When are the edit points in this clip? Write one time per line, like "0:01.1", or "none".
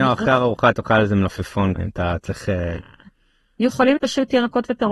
0:01.8
0:04.0